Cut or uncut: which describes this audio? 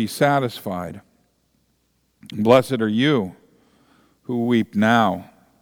uncut